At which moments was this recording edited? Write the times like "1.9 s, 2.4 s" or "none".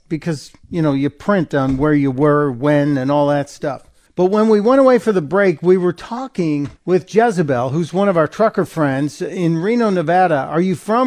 4.1 s, 6.8 s